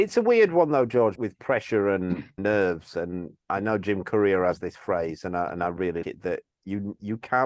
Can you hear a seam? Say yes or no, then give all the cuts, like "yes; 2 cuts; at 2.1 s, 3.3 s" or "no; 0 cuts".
yes; 3 cuts; at 1.2 s, 2.4 s, 6.0 s